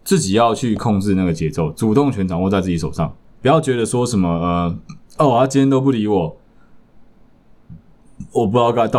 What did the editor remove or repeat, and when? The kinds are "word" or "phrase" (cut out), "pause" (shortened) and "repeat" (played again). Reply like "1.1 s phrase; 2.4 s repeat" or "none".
3.3 s pause; 5.1 s pause

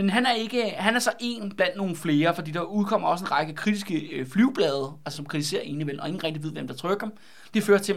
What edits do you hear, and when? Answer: 5.1 s word

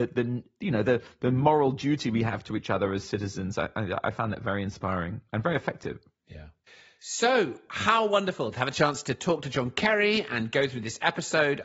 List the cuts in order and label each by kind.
5.3 s pause; 6.7 s pause

